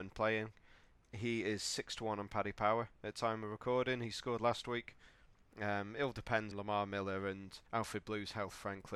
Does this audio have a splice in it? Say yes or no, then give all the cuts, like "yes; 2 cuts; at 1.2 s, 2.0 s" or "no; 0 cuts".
yes; 3 cuts; at 2.9 s, 6.5 s, 7.7 s